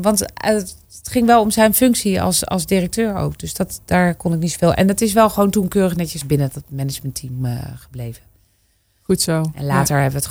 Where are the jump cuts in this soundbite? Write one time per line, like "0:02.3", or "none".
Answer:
0:06.2